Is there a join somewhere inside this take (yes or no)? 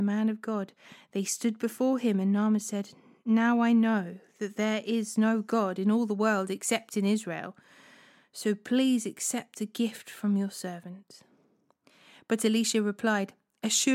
no